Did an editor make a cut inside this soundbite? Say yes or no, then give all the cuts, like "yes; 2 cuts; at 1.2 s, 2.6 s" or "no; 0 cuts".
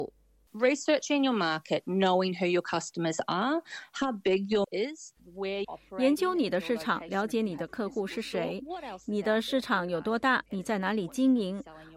yes; 2 cuts; at 4.6 s, 5.6 s